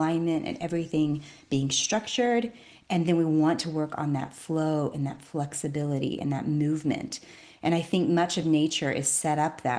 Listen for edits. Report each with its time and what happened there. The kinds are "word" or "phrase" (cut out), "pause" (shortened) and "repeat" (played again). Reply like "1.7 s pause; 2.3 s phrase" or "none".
none